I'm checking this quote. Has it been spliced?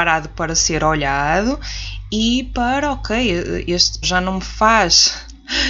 yes; 1 cut; at 4.0 s

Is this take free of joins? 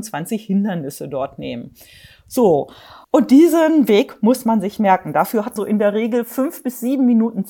no; 2 cuts; at 3.0 s, 5.6 s

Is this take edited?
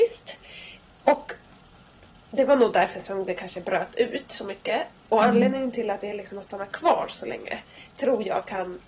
no; 0 cuts

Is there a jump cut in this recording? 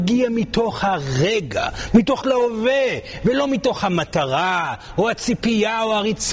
yes; 1 cut; at 2.2 s

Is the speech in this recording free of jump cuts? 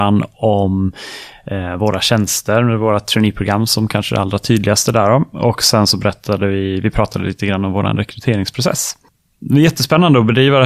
yes; 0 cuts

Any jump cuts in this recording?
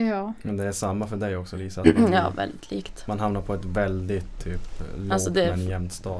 no; 0 cuts

